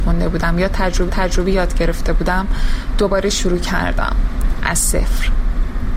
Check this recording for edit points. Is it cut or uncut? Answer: cut